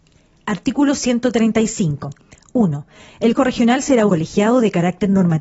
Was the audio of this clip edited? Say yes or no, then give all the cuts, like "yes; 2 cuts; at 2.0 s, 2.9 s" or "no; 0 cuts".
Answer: yes; 2 cuts; at 3.3 s, 4.1 s